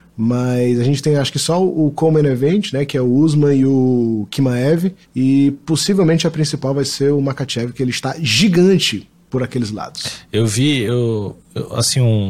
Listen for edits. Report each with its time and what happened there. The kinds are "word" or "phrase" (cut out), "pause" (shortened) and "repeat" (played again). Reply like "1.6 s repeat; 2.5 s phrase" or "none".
5.0 s pause